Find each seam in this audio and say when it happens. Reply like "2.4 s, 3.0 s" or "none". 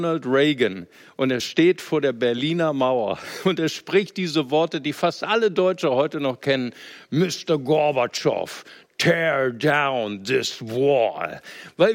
none